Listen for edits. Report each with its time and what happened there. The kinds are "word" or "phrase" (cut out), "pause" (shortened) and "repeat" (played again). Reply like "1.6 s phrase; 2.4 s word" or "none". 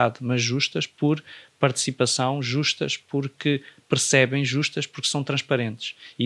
none